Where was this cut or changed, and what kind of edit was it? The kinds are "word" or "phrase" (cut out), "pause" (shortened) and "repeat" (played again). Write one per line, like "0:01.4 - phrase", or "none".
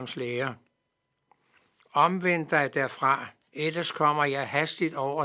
0:03.4 - pause